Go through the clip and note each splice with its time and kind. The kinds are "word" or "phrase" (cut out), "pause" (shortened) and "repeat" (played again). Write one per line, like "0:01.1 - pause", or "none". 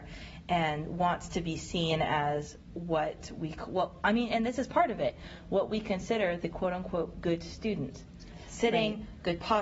none